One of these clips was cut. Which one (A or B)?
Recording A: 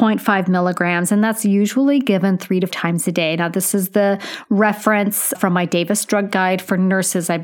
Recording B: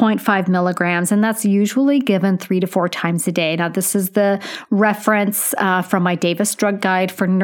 A